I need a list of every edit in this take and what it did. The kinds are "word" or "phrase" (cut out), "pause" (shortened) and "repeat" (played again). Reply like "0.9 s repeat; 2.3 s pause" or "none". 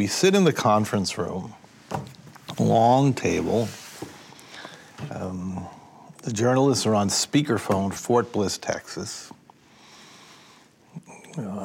2.6 s word; 6.1 s pause; 8.0 s word